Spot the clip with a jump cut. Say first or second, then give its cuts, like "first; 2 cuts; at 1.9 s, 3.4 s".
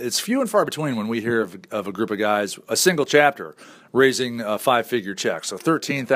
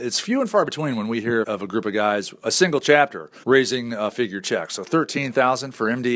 second; 3 cuts; at 1.4 s, 3.4 s, 4.1 s